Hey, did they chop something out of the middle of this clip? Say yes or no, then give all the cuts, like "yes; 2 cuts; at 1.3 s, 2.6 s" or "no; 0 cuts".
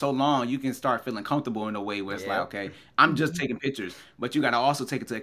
no; 0 cuts